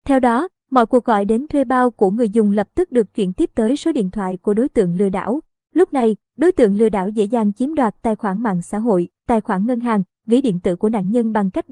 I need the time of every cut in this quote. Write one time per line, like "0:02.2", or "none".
none